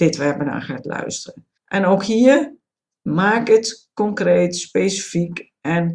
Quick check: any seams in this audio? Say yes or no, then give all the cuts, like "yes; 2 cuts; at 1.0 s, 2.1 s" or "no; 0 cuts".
yes; 1 cut; at 1.5 s